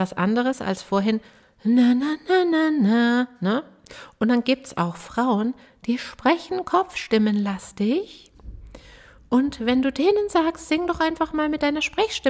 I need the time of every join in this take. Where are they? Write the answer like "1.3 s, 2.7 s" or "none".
none